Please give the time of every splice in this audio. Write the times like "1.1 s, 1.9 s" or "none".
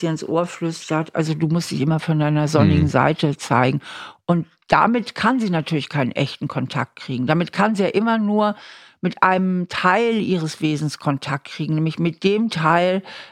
none